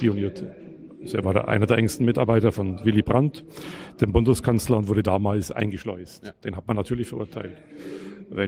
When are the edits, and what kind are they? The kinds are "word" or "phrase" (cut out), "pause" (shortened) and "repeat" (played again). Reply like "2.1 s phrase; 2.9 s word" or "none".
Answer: 6.3 s pause